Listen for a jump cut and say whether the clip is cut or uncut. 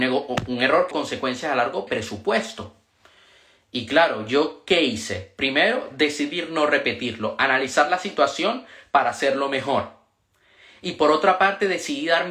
cut